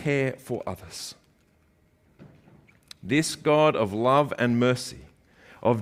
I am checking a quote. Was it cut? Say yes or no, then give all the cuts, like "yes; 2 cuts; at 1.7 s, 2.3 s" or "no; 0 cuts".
no; 0 cuts